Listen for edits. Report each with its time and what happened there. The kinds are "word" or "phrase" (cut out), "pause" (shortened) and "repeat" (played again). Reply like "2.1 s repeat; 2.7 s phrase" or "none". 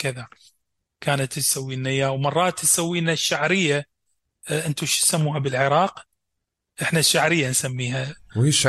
none

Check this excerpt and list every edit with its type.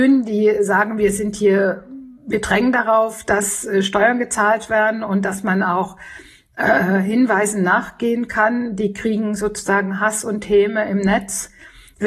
none

